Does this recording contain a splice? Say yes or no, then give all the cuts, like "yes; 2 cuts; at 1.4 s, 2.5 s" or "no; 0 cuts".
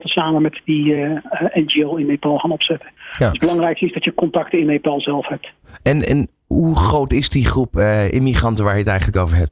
no; 0 cuts